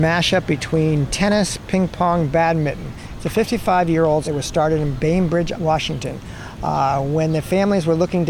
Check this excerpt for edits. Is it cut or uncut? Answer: cut